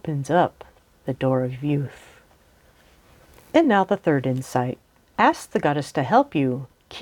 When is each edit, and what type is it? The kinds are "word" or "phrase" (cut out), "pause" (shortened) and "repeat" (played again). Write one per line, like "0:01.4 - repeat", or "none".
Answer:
none